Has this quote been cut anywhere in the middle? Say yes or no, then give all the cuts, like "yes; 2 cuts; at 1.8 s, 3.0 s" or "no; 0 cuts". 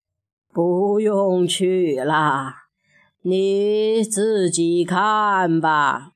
no; 0 cuts